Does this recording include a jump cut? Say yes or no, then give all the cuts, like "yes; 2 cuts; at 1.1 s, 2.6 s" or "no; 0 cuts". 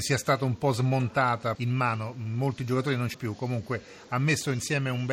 yes; 2 cuts; at 1.5 s, 3.1 s